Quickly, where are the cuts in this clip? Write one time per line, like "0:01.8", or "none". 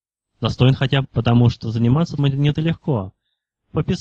0:01.0
0:02.2
0:02.5